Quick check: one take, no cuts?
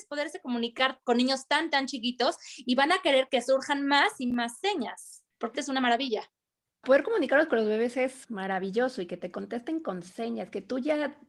no; 2 cuts; at 5.5 s, 8.2 s

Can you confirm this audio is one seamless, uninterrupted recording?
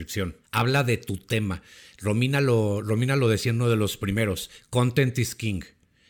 yes; 0 cuts

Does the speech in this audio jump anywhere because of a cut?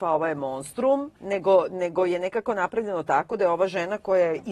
yes; 1 cut; at 1.2 s

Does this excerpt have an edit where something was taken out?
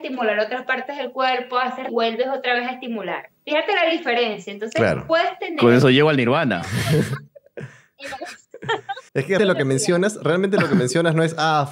yes; 5 cuts; at 1.9 s, 3.4 s, 7.3 s, 9.1 s, 9.4 s

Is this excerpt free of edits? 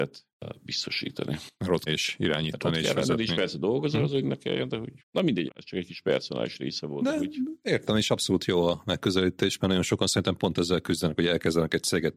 no; 3 cuts; at 1.9 s, 5.0 s, 5.5 s

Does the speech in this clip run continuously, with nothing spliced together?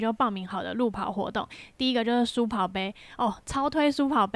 yes; 0 cuts

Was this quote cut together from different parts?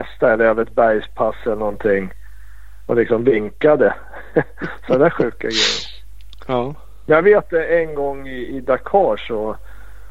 no; 0 cuts

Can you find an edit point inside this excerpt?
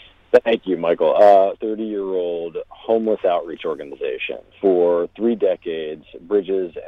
yes; 2 cuts; at 1.6 s, 4.5 s

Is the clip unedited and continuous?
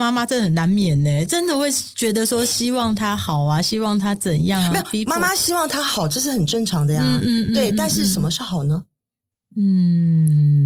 yes; 0 cuts

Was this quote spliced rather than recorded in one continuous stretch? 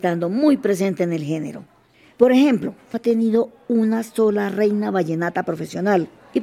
yes; 1 cut; at 2.9 s

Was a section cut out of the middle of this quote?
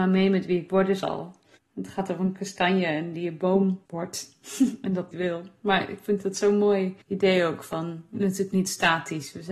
yes; 5 cuts; at 1.6 s, 3.9 s, 5.1 s, 7.0 s, 8.1 s

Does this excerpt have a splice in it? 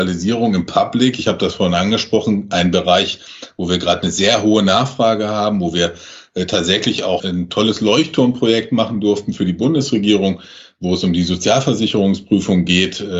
yes; 1 cut; at 7.2 s

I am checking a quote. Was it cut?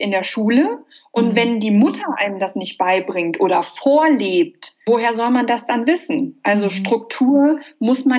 no; 0 cuts

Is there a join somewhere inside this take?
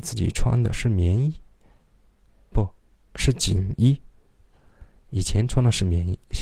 yes; 1 cut; at 2.5 s

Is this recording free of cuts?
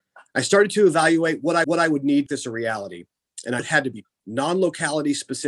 no; 4 cuts; at 1.6 s, 2.3 s, 3.6 s, 4.0 s

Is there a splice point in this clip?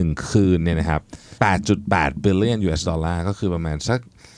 yes; 1 cut; at 1.4 s

